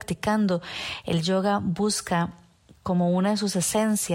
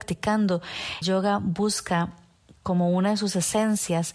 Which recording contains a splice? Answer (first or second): second